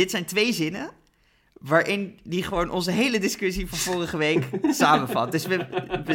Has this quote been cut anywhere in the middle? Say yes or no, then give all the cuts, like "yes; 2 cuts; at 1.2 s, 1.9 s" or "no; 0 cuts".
no; 0 cuts